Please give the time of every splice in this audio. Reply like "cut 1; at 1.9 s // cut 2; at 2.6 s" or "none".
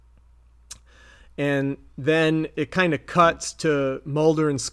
none